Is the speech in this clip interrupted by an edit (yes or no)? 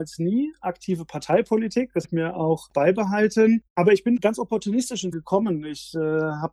yes